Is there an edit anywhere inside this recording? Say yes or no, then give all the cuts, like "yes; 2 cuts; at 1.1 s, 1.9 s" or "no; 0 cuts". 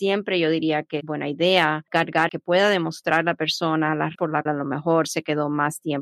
yes; 4 cuts; at 1.0 s, 2.3 s, 4.1 s, 4.5 s